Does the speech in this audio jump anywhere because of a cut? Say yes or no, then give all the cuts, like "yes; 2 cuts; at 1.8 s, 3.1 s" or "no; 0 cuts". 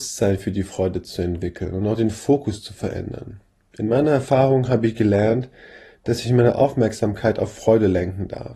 no; 0 cuts